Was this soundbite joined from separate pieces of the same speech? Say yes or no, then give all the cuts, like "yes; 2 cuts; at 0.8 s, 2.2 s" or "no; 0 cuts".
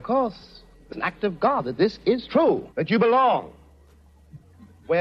yes; 2 cuts; at 0.9 s, 2.7 s